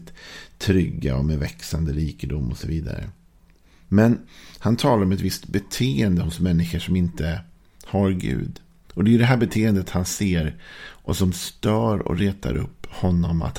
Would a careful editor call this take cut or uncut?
uncut